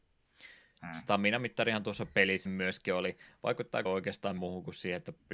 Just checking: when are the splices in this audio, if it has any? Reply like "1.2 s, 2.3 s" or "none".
2.5 s, 3.9 s, 4.4 s